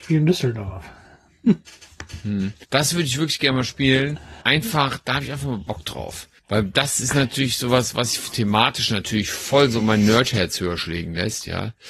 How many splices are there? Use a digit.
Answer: 3